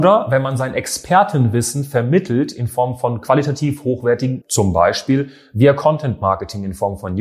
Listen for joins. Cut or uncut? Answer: cut